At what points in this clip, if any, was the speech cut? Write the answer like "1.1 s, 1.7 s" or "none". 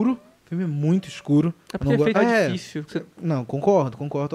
2.1 s, 2.9 s